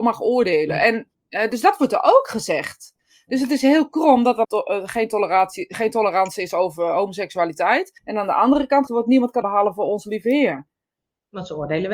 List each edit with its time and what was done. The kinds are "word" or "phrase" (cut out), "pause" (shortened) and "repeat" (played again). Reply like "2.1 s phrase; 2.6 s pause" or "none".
4.4 s phrase; 8.0 s pause; 8.9 s word; 9.4 s word